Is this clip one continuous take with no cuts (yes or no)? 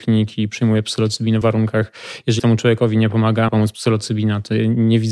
no